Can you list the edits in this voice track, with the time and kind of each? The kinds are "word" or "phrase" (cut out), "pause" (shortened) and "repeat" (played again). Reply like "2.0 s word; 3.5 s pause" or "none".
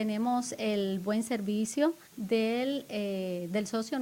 2.1 s pause